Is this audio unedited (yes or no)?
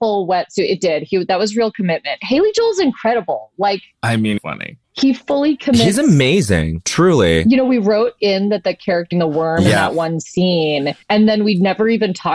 no